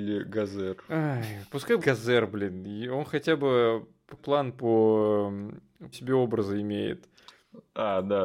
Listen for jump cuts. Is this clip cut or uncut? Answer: cut